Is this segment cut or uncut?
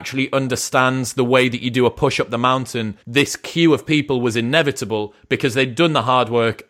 cut